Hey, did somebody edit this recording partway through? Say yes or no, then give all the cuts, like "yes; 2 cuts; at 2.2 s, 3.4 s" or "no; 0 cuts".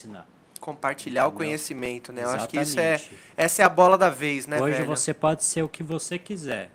no; 0 cuts